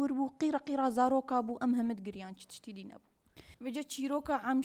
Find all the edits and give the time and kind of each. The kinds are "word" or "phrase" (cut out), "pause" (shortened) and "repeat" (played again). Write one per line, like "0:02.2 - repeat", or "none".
0:03.5 - pause